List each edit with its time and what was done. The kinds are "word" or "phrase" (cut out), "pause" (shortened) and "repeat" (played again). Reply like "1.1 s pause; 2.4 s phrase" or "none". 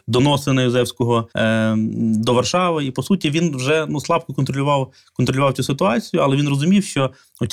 1.3 s pause